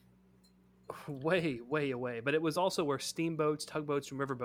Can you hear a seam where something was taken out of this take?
no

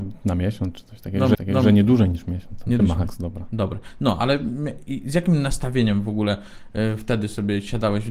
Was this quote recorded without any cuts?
no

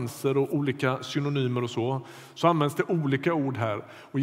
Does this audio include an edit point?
no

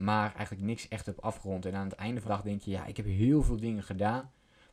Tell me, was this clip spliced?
yes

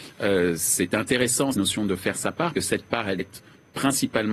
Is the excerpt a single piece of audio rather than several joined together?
no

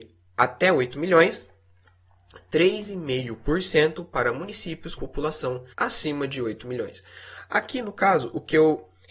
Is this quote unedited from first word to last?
no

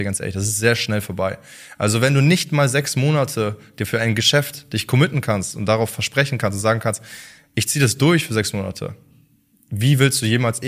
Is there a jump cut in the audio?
no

